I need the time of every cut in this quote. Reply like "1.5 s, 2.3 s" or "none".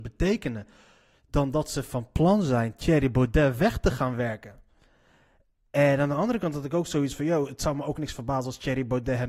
none